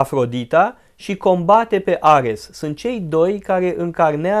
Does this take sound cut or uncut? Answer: uncut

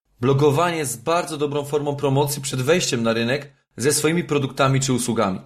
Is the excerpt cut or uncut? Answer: uncut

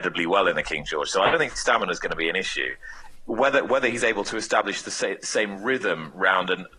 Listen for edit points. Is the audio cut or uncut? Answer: uncut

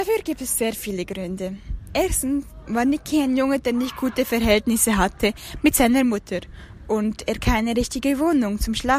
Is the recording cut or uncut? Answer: uncut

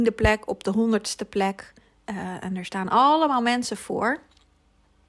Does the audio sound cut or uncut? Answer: uncut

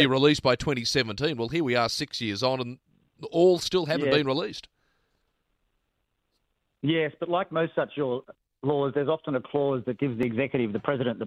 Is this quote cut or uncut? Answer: uncut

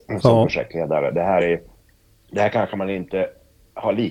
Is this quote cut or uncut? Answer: uncut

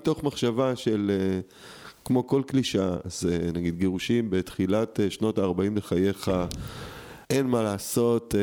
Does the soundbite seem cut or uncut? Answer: cut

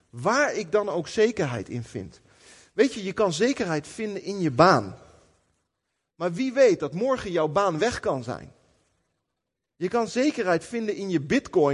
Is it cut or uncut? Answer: uncut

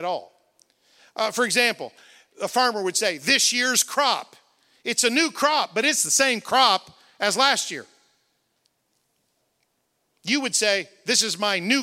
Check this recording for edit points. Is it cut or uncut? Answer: uncut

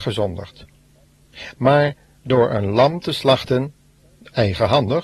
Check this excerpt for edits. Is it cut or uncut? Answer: uncut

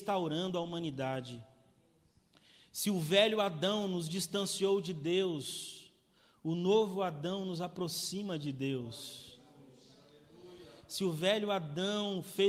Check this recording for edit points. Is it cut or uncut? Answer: uncut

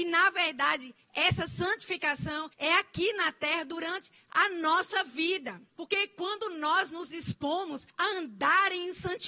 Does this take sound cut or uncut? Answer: cut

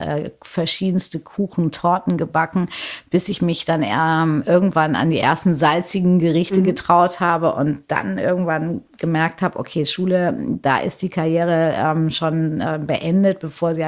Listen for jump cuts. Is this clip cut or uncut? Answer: uncut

